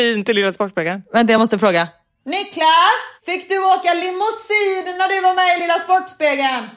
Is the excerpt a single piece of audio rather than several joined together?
yes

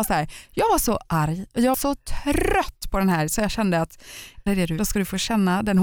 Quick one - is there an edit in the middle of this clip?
yes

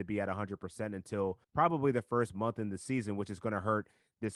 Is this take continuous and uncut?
no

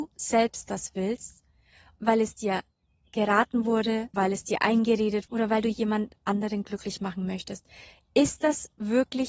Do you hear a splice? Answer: yes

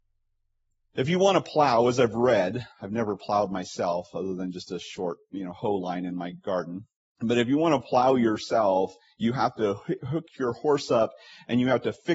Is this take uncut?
no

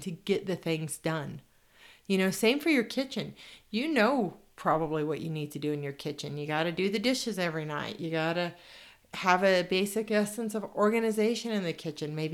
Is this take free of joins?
yes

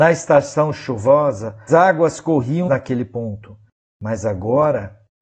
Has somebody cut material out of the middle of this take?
yes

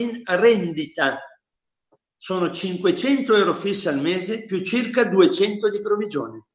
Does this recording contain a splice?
no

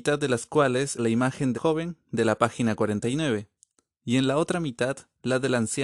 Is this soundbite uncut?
no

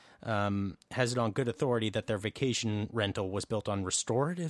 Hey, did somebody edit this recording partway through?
no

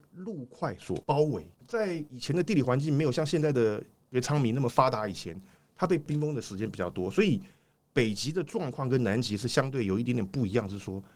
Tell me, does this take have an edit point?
yes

